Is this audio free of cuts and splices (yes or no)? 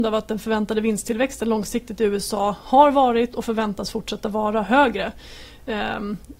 yes